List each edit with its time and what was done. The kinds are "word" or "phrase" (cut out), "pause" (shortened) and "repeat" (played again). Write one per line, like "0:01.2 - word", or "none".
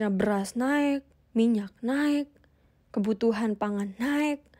0:01.1 - pause

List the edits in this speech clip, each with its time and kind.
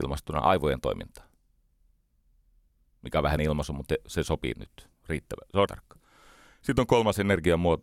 0:03.4 - word
0:04.6 - word
0:05.7 - word

